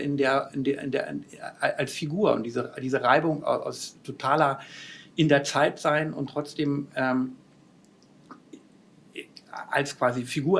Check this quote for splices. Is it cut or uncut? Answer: uncut